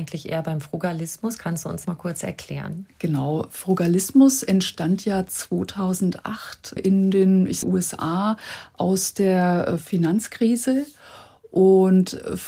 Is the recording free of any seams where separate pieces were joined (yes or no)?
no